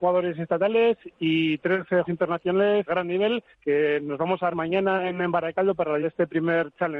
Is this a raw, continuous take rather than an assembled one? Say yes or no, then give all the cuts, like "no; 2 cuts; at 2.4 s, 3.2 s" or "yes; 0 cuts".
no; 5 cuts; at 2.0 s, 2.9 s, 3.5 s, 4.5 s, 6.0 s